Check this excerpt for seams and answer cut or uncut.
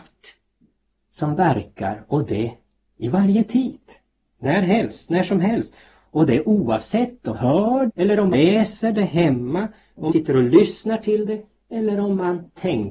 cut